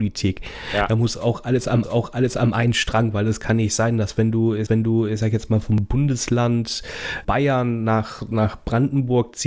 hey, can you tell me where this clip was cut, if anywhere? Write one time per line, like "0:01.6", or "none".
0:01.8
0:04.7
0:07.2